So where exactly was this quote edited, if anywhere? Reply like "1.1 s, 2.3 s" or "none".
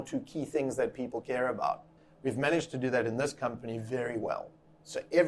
2.0 s